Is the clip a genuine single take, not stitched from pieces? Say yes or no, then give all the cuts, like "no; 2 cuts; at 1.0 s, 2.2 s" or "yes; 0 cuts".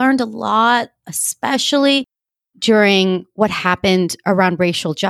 yes; 0 cuts